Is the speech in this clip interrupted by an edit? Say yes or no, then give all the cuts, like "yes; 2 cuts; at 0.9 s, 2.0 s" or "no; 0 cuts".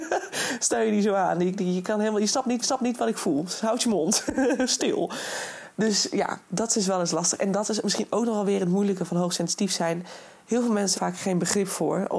yes; 2 cuts; at 2.6 s, 10.9 s